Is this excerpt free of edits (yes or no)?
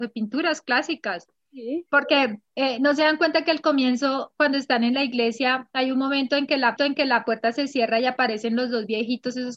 no